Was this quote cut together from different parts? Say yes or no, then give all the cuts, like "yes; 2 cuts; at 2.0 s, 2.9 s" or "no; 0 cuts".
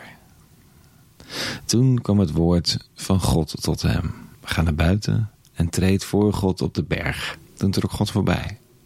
yes; 3 cuts; at 2.9 s, 4.3 s, 7.4 s